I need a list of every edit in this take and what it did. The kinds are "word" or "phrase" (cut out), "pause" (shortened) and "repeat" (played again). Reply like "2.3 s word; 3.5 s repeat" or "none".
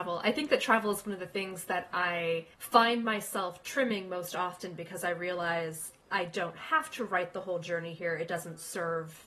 2.5 s pause